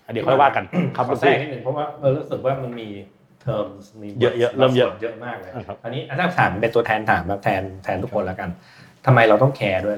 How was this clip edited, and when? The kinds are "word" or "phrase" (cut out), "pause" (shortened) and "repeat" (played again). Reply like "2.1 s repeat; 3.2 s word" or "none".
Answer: none